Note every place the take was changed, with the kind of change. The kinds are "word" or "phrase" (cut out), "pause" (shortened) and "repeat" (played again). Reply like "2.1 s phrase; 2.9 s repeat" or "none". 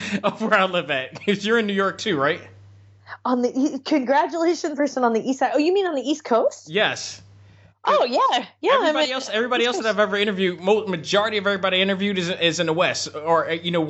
4.8 s phrase